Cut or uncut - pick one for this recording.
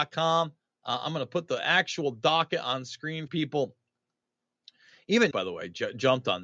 cut